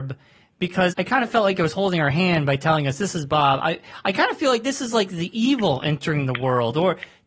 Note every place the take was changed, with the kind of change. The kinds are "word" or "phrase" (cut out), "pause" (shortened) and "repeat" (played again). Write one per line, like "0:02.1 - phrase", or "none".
0:00.9 - word